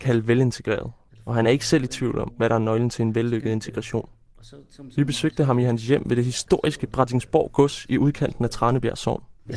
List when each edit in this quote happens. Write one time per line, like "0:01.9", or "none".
none